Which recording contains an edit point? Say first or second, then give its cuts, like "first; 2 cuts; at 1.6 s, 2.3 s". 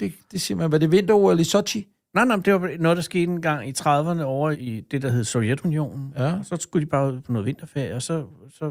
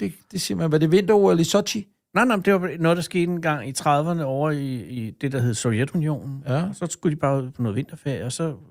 first; 1 cut; at 4.5 s